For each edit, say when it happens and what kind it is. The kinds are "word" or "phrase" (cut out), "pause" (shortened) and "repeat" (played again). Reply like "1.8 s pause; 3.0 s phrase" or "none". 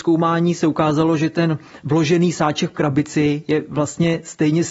none

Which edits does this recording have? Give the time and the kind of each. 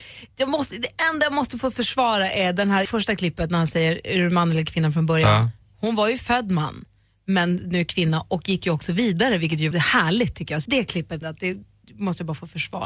2.9 s word; 9.7 s word; 10.7 s word; 11.2 s word

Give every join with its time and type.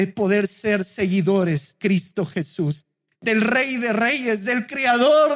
1.8 s word

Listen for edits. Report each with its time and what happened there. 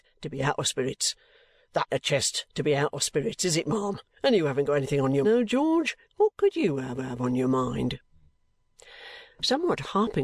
1.9 s word; 4.1 s pause; 5.2 s phrase; 6.0 s pause; 7.0 s repeat

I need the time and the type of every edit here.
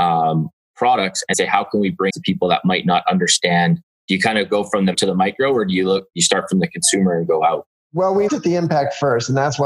1.3 s word; 2.1 s word; 4.9 s word; 8.3 s word

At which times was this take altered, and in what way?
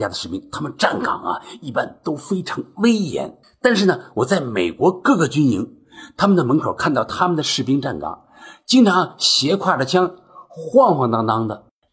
3.4 s pause

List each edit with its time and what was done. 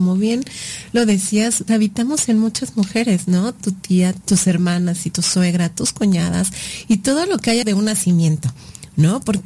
1.7 s word; 3.6 s word; 4.2 s word; 5.1 s word; 7.6 s word

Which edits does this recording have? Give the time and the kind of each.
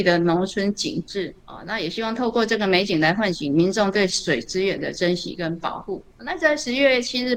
1.4 s pause; 6.1 s pause

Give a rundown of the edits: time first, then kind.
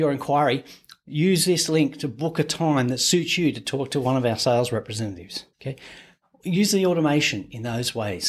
5.5 s pause

